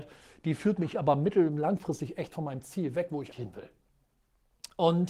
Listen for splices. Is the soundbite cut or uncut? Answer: cut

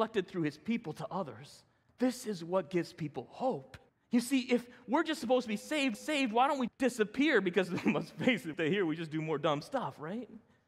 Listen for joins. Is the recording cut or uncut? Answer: cut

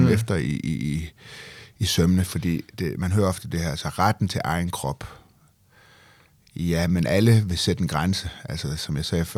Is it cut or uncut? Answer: uncut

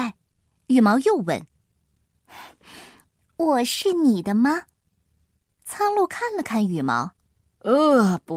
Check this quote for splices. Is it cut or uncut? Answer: uncut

